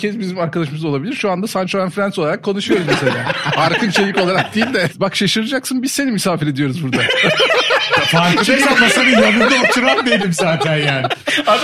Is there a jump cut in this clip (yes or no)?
no